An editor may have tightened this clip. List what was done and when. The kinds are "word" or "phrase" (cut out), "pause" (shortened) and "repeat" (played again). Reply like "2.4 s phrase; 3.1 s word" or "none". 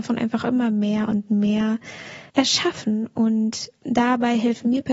2.3 s pause

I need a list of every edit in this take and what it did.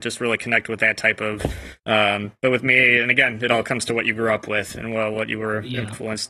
1.8 s pause

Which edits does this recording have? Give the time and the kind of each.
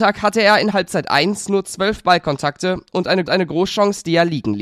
3.3 s repeat

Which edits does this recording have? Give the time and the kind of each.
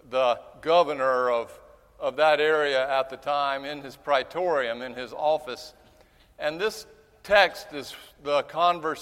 none

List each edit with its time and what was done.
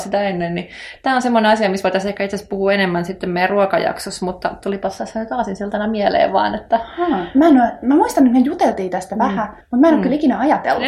9.6 s pause

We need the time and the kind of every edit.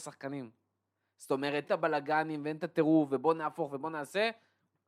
1.6 s word

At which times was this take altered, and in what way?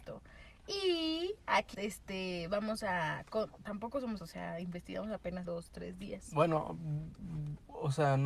1.7 s word; 3.6 s phrase; 4.2 s word; 5.4 s word

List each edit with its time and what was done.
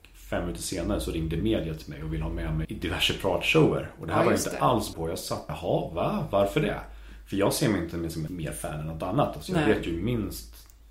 2.6 s word; 4.9 s word; 5.5 s phrase; 8.3 s word

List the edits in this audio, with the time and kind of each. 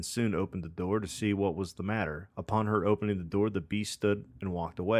none

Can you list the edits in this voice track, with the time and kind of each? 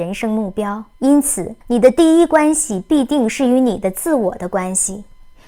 0.9 s pause; 1.6 s pause

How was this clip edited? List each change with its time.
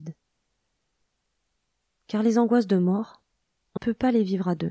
3.8 s word

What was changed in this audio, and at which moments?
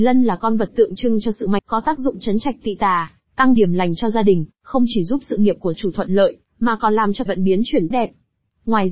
1.6 s word; 3.6 s word; 5.7 s word; 7.3 s word; 7.9 s word

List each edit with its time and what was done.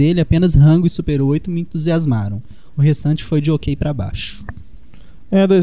none

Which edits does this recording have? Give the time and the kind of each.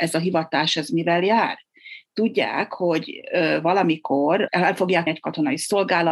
5.1 s word

